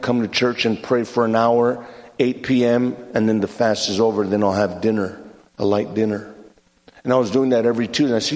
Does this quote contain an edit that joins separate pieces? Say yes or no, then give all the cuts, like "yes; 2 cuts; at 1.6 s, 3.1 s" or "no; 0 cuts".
no; 0 cuts